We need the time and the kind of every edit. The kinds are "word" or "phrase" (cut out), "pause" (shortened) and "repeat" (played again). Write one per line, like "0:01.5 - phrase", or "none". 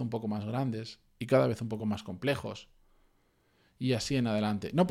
none